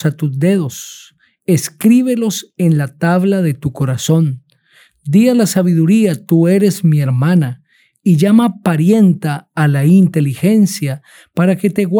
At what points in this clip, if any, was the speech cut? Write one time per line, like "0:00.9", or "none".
none